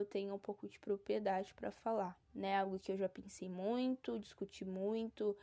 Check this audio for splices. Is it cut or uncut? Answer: cut